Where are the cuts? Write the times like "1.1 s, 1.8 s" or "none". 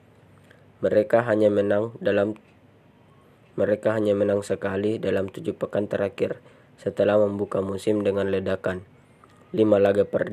none